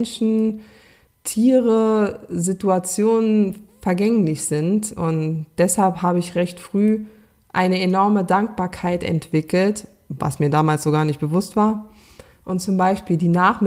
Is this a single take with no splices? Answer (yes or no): yes